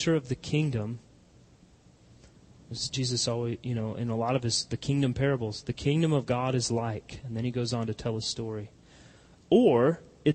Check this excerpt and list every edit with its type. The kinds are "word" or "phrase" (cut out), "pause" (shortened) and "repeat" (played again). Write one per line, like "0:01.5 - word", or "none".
none